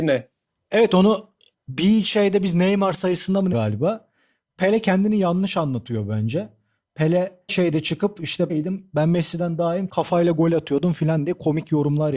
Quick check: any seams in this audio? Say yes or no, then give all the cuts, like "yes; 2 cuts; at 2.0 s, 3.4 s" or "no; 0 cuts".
yes; 4 cuts; at 3.5 s, 7.5 s, 8.5 s, 9.9 s